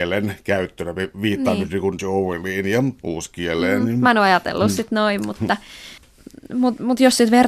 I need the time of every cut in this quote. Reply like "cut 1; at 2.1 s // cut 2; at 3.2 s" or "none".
cut 1; at 2.0 s